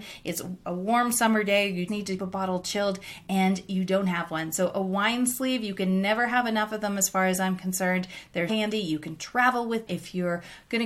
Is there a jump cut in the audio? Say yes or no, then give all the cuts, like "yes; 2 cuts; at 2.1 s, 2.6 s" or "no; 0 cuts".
yes; 4 cuts; at 1.9 s, 2.2 s, 8.5 s, 9.9 s